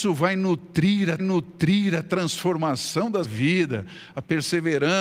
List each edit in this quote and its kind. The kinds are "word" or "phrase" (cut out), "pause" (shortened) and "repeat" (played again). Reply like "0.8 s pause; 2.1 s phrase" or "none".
1.2 s repeat; 3.2 s word